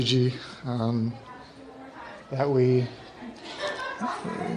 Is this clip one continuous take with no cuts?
yes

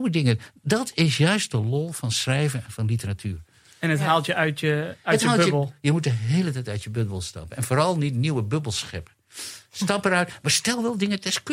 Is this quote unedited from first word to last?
yes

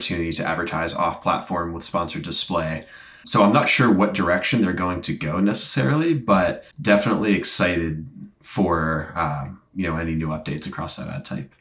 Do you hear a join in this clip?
yes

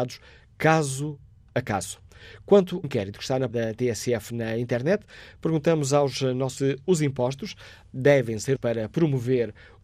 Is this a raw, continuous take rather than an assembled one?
no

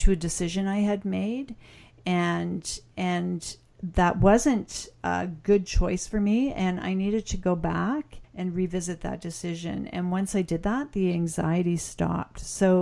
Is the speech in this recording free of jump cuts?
no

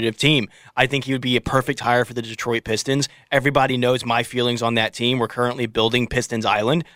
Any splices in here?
no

